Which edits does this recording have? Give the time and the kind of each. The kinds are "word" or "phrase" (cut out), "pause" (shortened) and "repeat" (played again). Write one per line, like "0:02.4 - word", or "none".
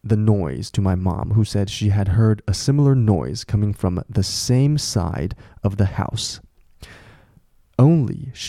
none